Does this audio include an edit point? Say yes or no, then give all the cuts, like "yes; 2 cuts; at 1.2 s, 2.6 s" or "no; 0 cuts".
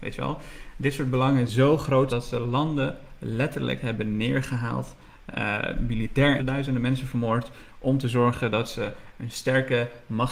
yes; 4 cuts; at 1.5 s, 2.1 s, 5.3 s, 6.4 s